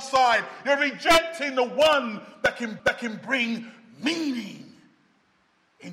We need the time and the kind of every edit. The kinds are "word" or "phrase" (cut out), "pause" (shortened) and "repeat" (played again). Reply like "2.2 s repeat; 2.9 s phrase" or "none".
2.8 s repeat